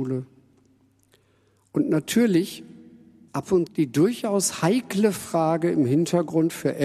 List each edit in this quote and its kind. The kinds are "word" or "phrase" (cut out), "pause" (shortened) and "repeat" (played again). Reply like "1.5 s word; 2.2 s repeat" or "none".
3.3 s word; 3.7 s word